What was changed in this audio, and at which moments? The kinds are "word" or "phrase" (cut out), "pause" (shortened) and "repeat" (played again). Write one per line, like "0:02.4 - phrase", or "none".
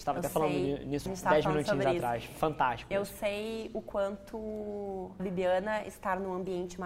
0:01.1 - word
0:05.2 - word